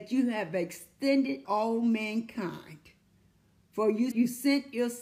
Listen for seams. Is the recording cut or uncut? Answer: cut